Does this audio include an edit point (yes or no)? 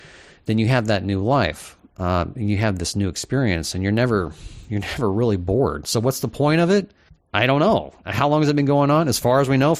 no